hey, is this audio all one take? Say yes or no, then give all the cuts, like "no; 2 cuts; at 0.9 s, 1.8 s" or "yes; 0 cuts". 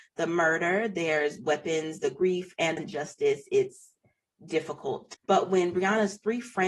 no; 2 cuts; at 2.8 s, 5.1 s